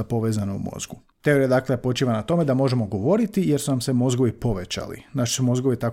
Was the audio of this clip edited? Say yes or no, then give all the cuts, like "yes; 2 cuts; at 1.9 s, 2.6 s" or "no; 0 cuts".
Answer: no; 0 cuts